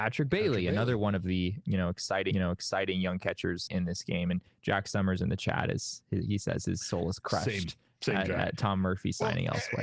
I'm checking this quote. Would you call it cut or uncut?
cut